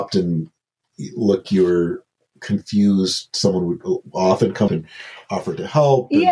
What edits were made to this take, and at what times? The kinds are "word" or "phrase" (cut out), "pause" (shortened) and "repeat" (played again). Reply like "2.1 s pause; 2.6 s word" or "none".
1.4 s word; 4.7 s word